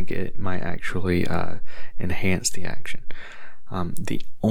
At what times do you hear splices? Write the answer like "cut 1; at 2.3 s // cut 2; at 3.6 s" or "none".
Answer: none